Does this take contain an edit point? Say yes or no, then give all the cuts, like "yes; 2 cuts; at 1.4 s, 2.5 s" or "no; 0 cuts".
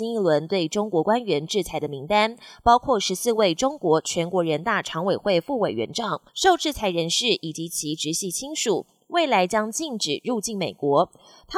yes; 1 cut; at 6.3 s